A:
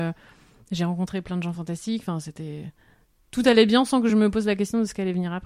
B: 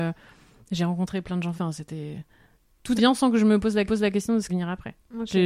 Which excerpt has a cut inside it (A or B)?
B